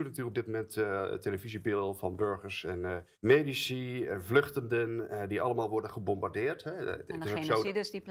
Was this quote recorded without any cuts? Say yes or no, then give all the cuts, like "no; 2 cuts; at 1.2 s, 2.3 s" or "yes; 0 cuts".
no; 1 cut; at 3.1 s